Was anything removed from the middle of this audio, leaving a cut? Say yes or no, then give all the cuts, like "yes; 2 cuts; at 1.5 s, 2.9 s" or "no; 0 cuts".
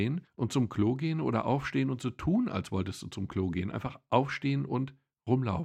no; 0 cuts